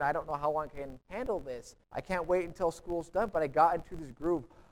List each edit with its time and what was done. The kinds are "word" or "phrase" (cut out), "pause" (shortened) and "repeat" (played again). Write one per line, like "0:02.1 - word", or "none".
0:01.8 - pause